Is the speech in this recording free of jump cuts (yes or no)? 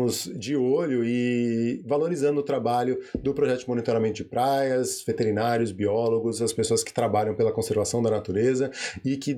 yes